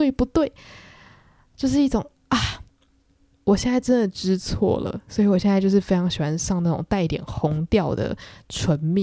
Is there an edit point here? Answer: no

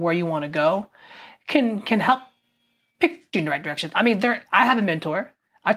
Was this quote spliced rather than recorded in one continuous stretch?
yes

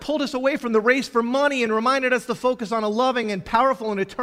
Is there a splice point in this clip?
no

